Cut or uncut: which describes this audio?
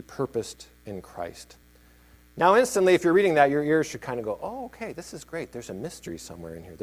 uncut